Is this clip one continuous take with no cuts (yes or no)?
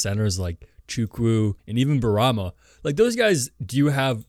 no